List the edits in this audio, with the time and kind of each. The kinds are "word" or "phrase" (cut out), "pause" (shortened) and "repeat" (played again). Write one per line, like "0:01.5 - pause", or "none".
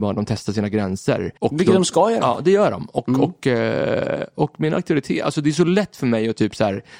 0:01.4 - pause